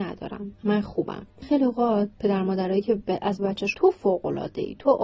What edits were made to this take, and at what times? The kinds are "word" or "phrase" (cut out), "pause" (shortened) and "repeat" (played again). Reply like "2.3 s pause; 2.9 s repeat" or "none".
1.4 s word; 3.4 s word; 3.7 s word